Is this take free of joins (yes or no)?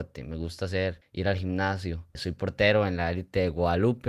yes